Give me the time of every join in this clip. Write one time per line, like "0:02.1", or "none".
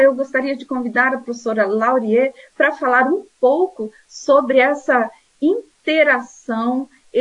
none